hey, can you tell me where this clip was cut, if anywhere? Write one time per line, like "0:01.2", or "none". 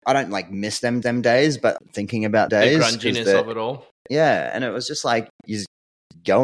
0:01.0
0:01.8
0:02.5
0:04.0